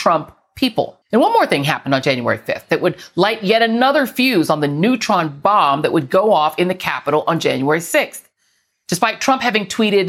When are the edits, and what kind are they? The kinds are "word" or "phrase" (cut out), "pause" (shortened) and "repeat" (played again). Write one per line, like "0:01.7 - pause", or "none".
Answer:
0:01.0 - pause